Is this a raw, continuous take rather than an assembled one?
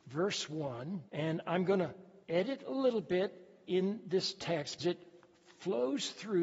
no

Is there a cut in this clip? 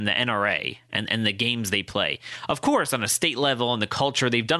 no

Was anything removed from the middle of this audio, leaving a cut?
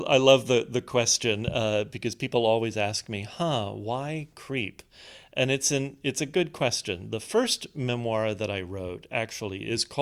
no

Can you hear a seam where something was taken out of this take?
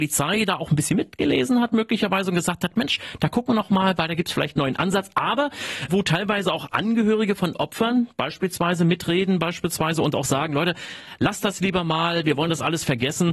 yes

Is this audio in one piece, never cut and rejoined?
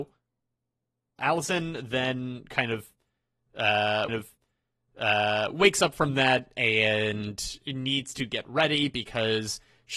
no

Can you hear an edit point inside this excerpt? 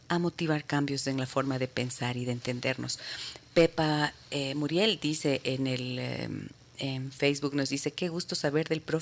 no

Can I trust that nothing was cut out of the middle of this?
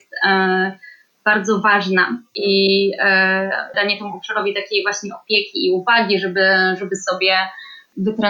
no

